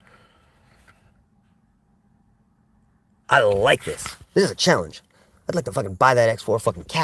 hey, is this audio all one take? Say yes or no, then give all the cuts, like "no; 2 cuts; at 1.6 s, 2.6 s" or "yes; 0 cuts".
yes; 0 cuts